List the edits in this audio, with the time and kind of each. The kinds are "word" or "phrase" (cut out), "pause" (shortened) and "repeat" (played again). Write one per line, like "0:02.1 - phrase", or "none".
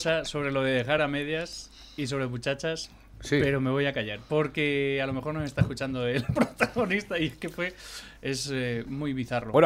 none